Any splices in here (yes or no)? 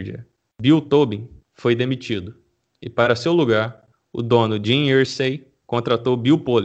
no